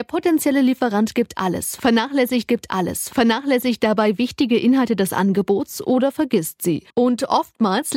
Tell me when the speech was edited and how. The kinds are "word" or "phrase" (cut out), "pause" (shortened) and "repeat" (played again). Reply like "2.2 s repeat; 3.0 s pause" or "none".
2.5 s repeat; 6.9 s pause

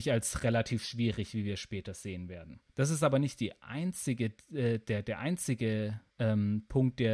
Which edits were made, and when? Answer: 2.7 s pause; 6.1 s pause

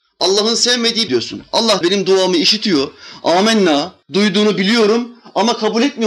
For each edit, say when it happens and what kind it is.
1.1 s phrase; 1.8 s word; 4.0 s pause

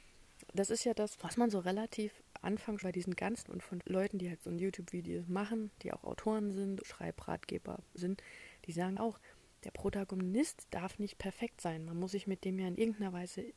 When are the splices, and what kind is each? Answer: 1.2 s word; 2.4 s word; 2.8 s word; 3.4 s word; 3.8 s word; 4.4 s word; 6.8 s word; 8.0 s word; 9.0 s word

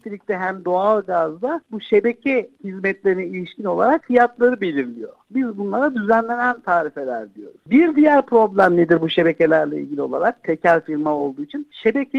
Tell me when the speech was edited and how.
none

